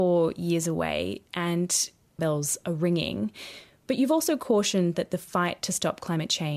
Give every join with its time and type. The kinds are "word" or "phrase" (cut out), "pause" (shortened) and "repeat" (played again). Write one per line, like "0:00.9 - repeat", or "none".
0:02.2 - phrase